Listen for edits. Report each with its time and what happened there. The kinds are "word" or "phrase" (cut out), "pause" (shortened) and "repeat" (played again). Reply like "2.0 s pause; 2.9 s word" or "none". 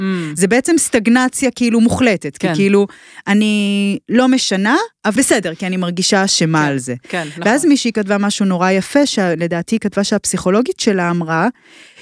5.2 s word

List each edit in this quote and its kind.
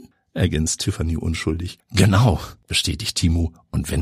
none

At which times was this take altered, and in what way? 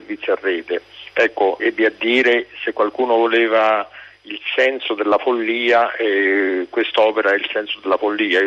1.6 s word

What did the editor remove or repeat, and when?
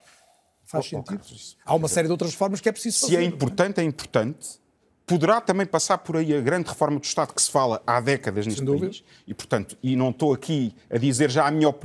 none

